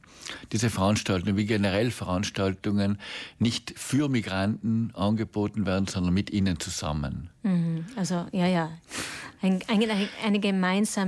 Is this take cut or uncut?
uncut